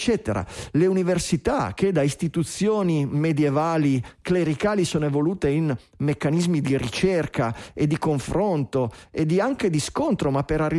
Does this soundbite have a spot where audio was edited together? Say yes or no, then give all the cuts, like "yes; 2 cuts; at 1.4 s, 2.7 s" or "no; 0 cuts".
no; 0 cuts